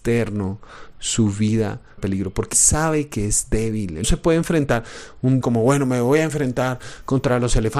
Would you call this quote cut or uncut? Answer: cut